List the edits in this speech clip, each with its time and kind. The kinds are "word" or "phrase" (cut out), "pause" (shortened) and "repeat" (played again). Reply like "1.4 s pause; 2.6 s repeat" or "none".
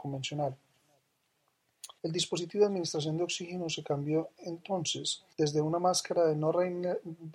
2.0 s pause; 5.3 s pause

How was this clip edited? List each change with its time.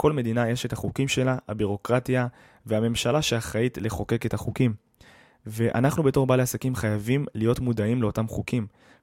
none

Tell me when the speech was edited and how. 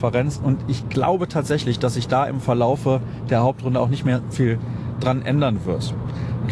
4.3 s word

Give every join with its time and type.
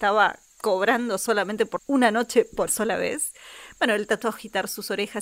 1.8 s word; 2.7 s word; 4.2 s word

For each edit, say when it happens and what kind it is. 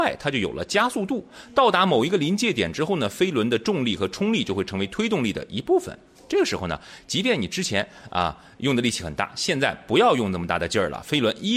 none

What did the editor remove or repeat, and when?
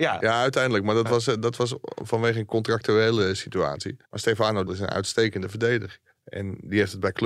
4.0 s pause; 4.7 s word; 6.1 s pause

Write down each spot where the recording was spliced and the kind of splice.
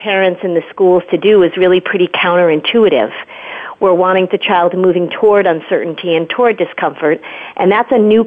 4.3 s phrase

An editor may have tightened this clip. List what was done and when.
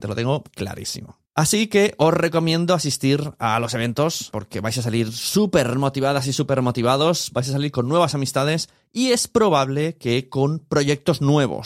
1.3 s pause; 4.3 s word

